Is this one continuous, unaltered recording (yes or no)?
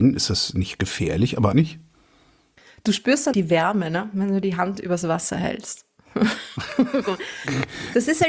no